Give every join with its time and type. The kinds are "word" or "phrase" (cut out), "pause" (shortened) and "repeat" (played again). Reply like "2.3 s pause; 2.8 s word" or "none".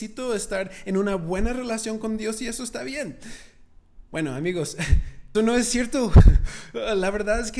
5.3 s word